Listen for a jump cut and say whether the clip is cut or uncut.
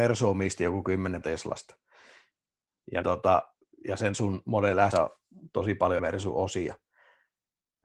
cut